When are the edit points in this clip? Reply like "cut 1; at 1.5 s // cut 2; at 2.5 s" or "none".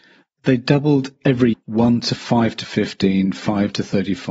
cut 1; at 1.5 s // cut 2; at 2.2 s